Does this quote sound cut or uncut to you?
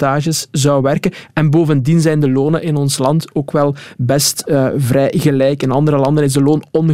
uncut